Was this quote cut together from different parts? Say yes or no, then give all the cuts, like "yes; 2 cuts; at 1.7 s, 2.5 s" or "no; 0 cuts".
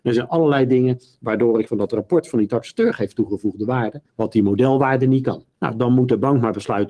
yes; 3 cuts; at 1.7 s, 4.1 s, 5.5 s